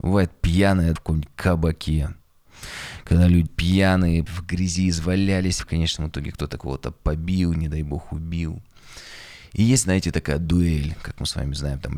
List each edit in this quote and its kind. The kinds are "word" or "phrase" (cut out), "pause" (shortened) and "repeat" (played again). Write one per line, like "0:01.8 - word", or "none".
0:01.0 - word
0:03.5 - word
0:04.3 - word
0:05.6 - word

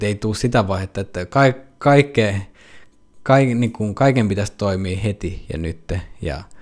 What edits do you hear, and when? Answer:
none

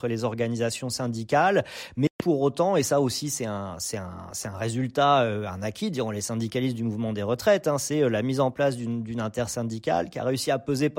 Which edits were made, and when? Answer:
none

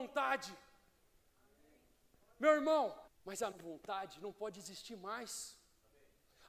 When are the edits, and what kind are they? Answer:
0:03.1 - phrase
0:03.5 - word

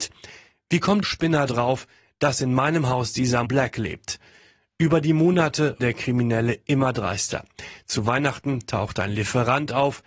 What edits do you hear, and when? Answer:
0:01.0 - word
0:01.5 - word
0:03.4 - word
0:05.8 - word

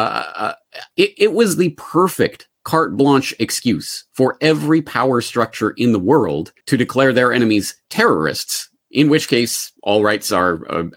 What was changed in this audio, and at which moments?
0:00.9 - pause
0:06.6 - pause
0:09.8 - pause

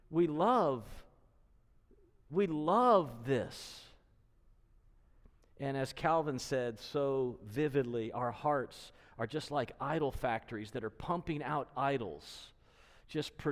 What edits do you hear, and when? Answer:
none

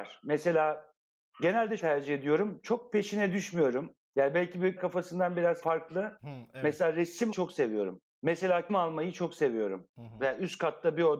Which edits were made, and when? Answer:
0:01.8 - word
0:04.8 - word
0:05.6 - word
0:07.3 - word
0:08.7 - word

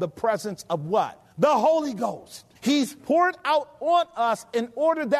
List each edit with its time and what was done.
0:01.3 - pause
0:02.5 - pause

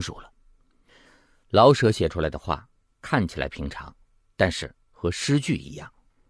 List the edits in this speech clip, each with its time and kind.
none

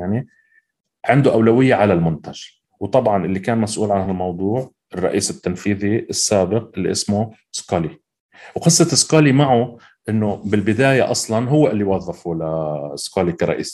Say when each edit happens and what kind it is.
none

